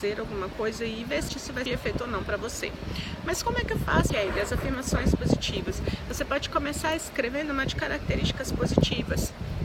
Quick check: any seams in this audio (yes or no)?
yes